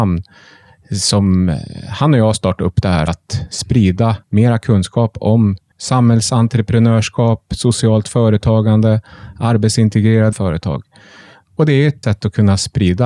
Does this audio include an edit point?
yes; 5 cuts; at 3.1 s, 4.2 s, 5.7 s, 10.3 s, 12.0 s

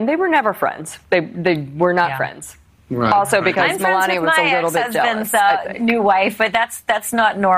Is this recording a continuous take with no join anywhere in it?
no; 2 cuts; at 1.0 s, 2.7 s

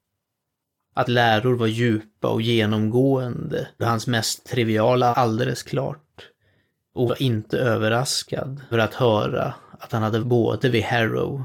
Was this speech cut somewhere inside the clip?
yes; 6 cuts; at 1.1 s, 3.8 s, 5.1 s, 7.1 s, 8.7 s, 10.2 s

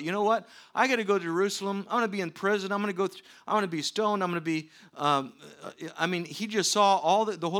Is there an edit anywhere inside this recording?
no; 0 cuts

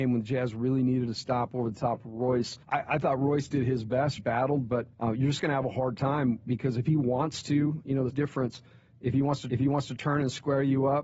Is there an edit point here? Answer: yes; 5 cuts; at 2.6 s, 4.2 s, 4.9 s, 8.1 s, 9.5 s

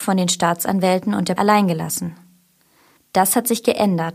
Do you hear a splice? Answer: yes; 1 cut; at 1.4 s

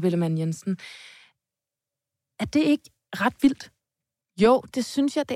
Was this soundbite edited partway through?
no; 0 cuts

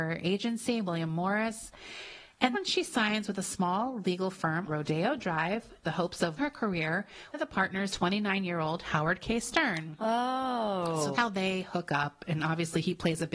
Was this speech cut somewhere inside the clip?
yes; 7 cuts; at 2.5 s, 4.7 s, 5.8 s, 6.4 s, 7.3 s, 7.9 s, 11.1 s

